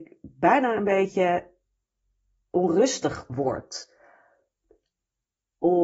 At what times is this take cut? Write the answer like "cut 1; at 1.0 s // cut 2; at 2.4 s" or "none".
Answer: cut 1; at 3.3 s